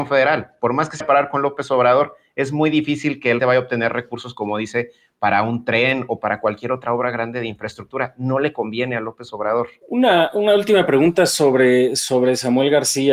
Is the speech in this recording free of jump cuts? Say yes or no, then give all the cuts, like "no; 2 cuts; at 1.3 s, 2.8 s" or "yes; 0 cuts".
no; 2 cuts; at 1.0 s, 3.4 s